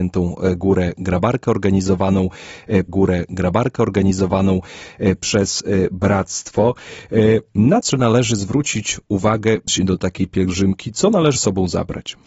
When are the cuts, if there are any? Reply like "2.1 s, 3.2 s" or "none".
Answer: 2.9 s, 7.9 s, 9.7 s, 11.4 s